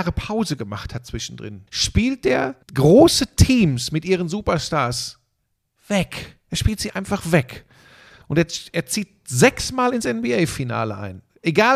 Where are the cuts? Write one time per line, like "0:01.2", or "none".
0:01.7
0:02.6